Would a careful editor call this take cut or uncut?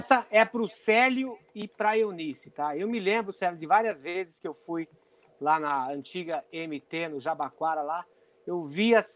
uncut